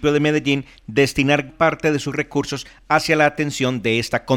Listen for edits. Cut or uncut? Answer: cut